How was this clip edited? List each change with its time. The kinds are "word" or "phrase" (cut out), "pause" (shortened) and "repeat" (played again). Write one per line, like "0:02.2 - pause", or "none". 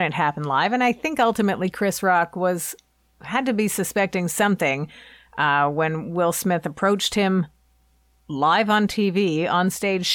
none